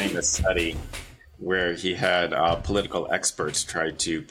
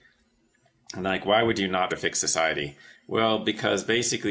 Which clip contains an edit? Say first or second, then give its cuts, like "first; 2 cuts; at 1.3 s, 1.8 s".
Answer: second; 1 cut; at 1.9 s